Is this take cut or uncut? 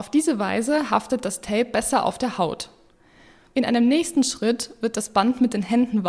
uncut